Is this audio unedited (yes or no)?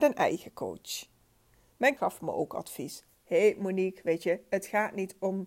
no